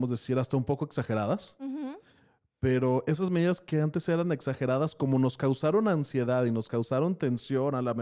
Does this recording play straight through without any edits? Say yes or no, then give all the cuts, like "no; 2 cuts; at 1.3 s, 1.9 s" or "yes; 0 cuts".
yes; 0 cuts